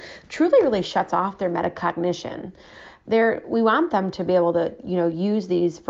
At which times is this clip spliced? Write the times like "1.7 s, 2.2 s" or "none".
none